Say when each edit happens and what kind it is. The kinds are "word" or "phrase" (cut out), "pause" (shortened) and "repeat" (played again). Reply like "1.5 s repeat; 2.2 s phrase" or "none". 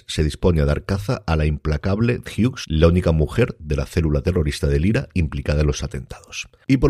2.3 s word